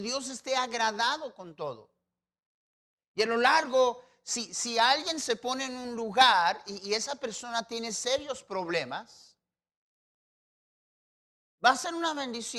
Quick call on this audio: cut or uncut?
uncut